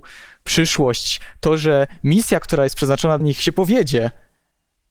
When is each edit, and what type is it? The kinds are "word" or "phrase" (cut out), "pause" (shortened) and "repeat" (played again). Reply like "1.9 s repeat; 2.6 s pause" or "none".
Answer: 3.2 s word